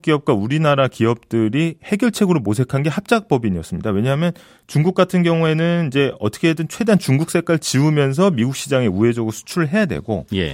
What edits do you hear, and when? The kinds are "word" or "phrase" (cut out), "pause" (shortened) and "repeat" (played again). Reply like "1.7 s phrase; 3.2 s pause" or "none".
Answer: none